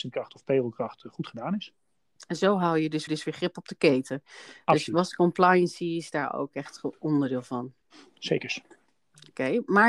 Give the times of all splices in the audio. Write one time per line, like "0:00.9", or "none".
0:03.1